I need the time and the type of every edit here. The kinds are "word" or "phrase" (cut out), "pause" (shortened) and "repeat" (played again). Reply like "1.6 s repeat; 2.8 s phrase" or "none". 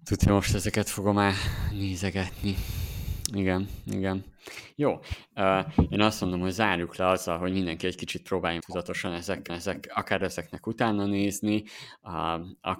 8.6 s word; 9.5 s repeat